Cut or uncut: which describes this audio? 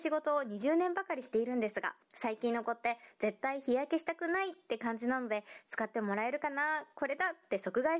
cut